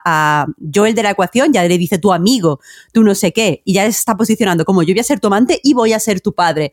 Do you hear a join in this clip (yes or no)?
no